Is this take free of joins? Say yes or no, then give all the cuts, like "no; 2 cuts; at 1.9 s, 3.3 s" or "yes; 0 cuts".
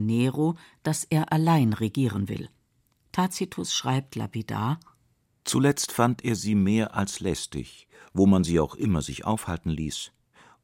yes; 0 cuts